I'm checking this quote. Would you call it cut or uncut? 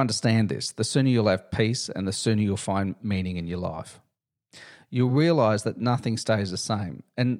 uncut